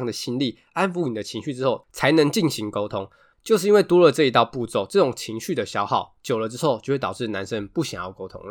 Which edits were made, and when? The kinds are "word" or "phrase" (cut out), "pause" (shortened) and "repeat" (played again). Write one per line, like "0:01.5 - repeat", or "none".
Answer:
none